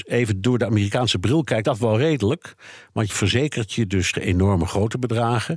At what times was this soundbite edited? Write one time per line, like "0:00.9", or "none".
0:01.6
0:03.1
0:04.1

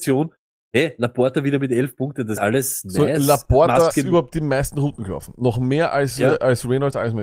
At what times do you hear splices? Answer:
0:02.4
0:03.9

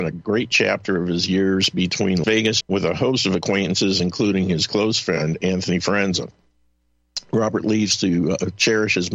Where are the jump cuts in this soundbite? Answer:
0:02.2
0:02.6

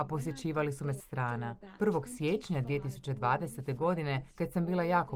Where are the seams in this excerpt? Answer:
0:01.0

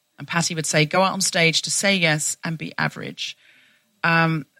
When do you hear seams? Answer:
none

